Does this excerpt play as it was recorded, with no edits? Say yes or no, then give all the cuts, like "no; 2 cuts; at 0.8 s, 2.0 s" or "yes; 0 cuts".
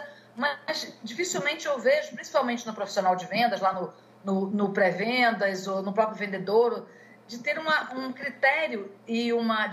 yes; 0 cuts